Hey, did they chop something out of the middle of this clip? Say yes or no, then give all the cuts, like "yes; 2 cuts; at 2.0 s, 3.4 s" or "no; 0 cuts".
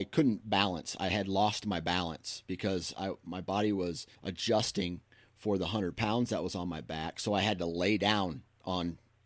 yes; 1 cut; at 4.1 s